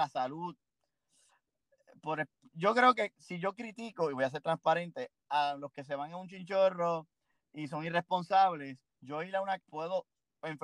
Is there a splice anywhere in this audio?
yes; 3 cuts; at 2.5 s, 8.9 s, 9.6 s

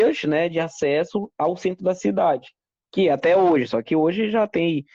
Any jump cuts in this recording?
no; 0 cuts

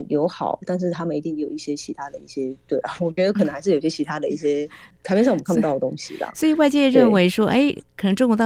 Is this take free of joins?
yes; 0 cuts

